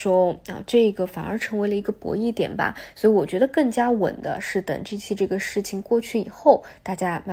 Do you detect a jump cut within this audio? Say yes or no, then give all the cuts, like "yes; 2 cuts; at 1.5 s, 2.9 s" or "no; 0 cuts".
no; 0 cuts